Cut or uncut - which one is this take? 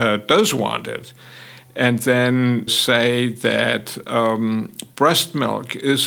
cut